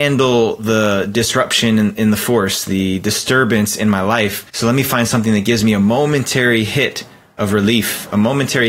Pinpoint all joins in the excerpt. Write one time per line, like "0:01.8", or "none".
0:04.5